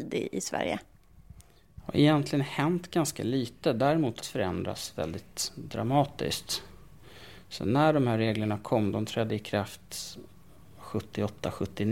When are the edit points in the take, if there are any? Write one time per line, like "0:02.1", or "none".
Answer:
0:04.2

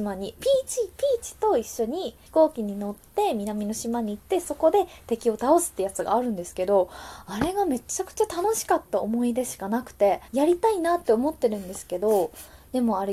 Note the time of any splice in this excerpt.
0:02.3
0:10.3

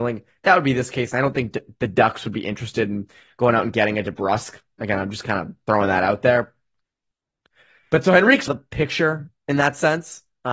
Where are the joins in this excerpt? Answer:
0:08.5

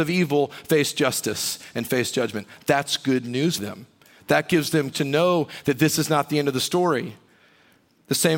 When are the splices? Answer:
0:03.6
0:04.9

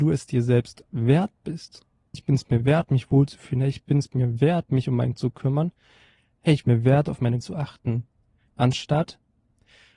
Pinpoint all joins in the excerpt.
0:02.1
0:05.2
0:06.6
0:07.4

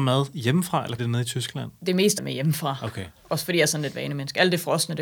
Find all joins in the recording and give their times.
0:01.0
0:02.2

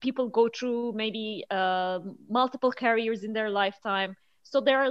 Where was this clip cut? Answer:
none

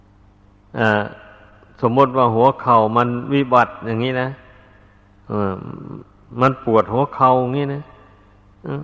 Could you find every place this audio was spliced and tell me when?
none

